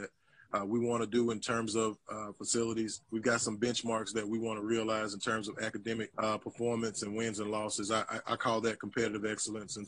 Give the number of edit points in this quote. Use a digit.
2